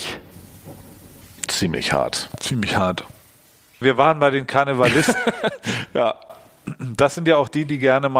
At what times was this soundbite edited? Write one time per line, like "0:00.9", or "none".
none